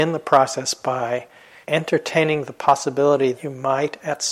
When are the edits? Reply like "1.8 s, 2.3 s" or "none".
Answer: 1.6 s, 3.3 s